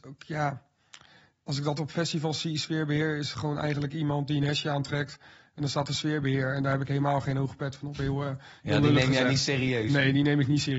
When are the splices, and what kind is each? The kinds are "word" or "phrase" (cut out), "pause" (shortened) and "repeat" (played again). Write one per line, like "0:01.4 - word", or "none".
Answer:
none